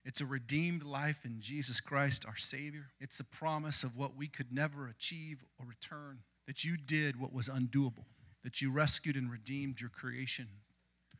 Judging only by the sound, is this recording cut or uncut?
cut